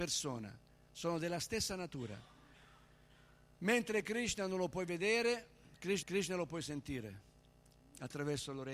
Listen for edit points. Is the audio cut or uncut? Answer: cut